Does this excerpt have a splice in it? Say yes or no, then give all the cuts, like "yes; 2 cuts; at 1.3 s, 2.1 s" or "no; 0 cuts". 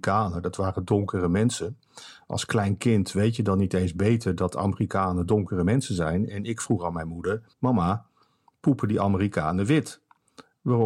yes; 1 cut; at 7.5 s